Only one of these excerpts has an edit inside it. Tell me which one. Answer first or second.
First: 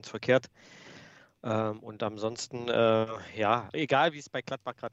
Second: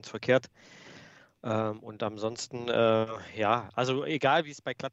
first